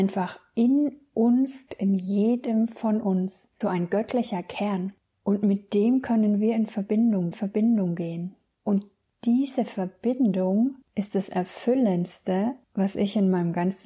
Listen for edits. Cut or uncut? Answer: cut